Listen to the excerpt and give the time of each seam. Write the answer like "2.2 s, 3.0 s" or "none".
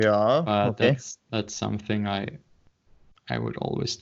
1.2 s